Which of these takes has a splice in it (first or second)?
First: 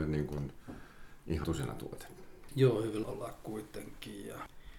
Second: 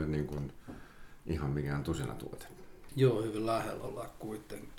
first